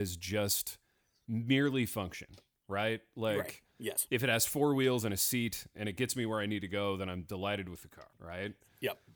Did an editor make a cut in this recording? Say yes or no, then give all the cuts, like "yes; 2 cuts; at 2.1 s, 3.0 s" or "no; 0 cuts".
yes; 1 cut; at 8.1 s